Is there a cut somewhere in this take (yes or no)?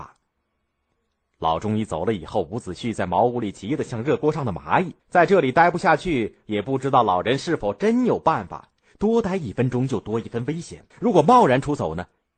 yes